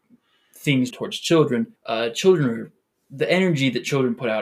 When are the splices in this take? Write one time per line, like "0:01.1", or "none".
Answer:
0:00.9
0:01.8